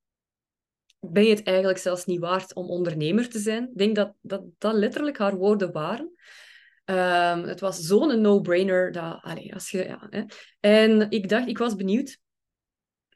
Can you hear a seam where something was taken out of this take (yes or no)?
no